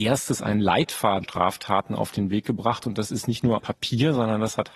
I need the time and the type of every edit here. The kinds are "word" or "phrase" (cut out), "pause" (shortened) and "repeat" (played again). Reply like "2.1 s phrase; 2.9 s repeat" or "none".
1.2 s phrase; 3.6 s word